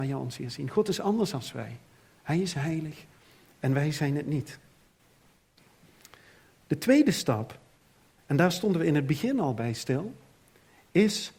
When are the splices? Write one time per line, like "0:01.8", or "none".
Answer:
none